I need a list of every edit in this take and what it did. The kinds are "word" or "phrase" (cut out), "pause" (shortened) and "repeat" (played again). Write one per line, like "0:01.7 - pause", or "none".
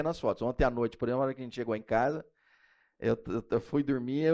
none